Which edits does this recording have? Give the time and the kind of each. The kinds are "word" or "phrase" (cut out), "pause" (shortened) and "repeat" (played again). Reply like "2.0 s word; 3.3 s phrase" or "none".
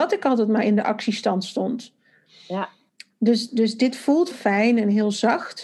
2.9 s pause; 4.3 s phrase